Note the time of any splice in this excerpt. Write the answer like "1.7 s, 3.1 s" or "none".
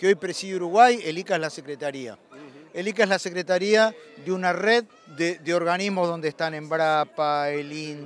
4.9 s